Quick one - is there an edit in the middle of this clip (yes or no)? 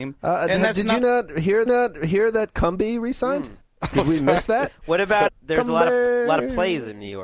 yes